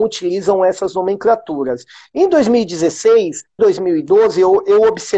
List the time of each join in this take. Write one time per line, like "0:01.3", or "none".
0:03.6